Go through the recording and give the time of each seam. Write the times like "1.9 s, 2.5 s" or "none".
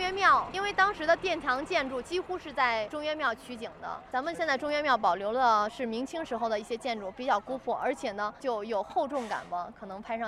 none